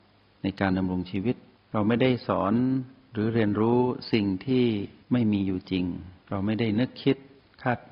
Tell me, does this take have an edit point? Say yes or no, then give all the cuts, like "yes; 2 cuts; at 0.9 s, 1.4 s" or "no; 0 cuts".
yes; 3 cuts; at 1.5 s, 5.0 s, 6.2 s